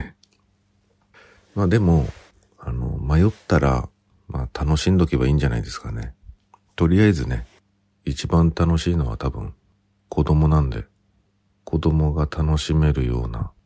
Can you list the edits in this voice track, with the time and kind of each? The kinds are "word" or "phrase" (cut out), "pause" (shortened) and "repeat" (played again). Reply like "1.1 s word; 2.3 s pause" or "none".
none